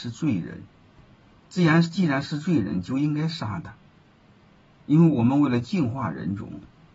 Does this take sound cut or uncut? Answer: cut